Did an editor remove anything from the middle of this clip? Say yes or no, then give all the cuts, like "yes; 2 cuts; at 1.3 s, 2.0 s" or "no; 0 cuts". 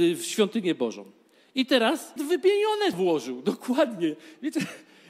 yes; 2 cuts; at 2.2 s, 2.9 s